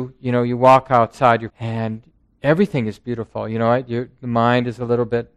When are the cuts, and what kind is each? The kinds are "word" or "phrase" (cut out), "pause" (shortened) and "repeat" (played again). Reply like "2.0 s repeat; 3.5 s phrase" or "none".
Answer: 1.5 s phrase; 2.1 s pause